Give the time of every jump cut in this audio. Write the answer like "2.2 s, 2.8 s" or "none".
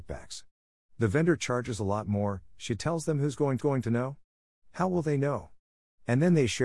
3.6 s